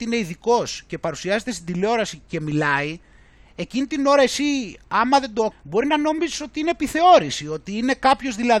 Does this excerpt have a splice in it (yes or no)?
yes